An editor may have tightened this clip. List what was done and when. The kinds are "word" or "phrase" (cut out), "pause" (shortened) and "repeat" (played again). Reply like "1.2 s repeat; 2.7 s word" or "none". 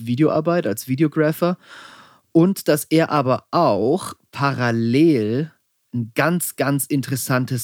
none

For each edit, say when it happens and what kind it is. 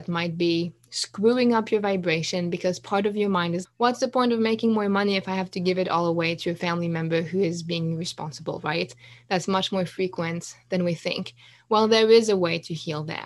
3.6 s word

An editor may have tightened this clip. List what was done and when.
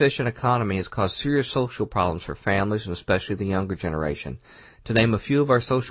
none

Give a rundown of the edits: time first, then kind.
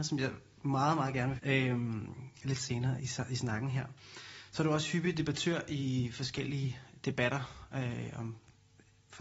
1.4 s phrase; 3.0 s word

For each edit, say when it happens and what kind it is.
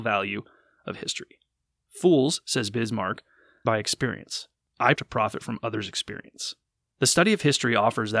3.6 s phrase; 4.9 s word

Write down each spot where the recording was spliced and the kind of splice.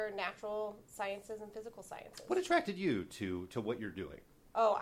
none

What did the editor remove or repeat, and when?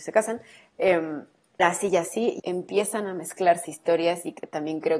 1.6 s word; 2.4 s word; 3.6 s word

